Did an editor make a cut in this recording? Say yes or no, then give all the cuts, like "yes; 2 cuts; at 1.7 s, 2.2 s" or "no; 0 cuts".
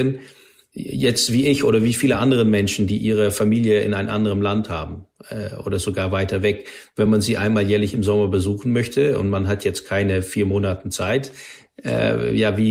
no; 0 cuts